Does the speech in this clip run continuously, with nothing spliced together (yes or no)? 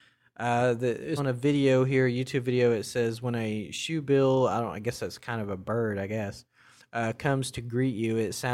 no